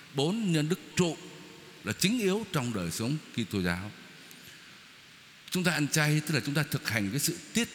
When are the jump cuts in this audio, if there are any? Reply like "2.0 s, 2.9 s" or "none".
0.9 s